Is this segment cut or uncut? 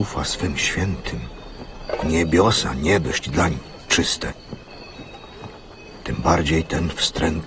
uncut